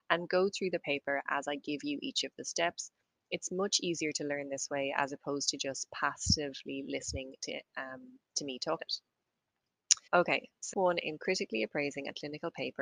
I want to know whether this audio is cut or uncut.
cut